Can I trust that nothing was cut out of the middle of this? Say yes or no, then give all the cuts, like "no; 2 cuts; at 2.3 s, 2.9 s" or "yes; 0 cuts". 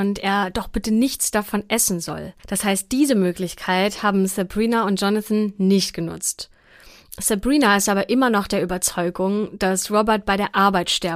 no; 1 cut; at 2.4 s